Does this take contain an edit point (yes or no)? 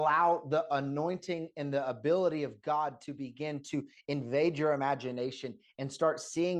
no